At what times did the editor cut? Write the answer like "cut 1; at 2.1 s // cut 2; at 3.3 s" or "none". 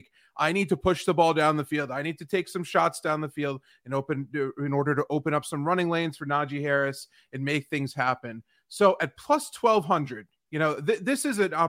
none